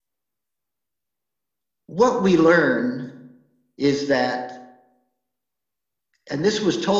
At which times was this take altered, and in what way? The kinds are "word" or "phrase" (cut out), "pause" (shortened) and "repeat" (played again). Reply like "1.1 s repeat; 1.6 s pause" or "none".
none